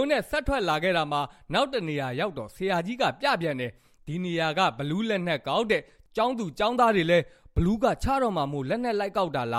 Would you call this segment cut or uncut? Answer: uncut